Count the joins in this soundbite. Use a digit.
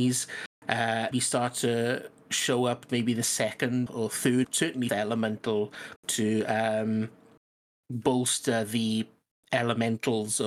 6